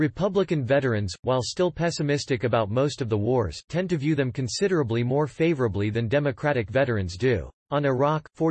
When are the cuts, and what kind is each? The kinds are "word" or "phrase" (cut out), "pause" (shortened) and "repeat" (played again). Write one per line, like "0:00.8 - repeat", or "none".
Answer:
0:07.6 - pause